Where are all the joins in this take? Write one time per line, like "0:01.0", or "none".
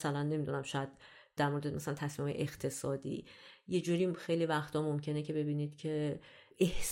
none